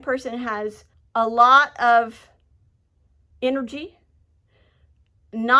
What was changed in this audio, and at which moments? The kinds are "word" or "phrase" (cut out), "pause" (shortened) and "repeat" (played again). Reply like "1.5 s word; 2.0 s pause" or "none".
0.9 s pause